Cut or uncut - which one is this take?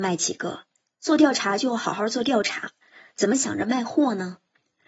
uncut